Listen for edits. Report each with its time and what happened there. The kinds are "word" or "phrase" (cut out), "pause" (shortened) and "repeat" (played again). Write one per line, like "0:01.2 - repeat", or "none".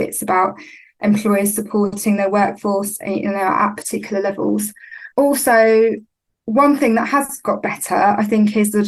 0:05.1 - pause